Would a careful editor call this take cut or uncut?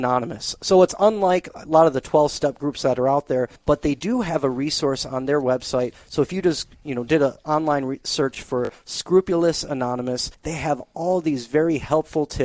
cut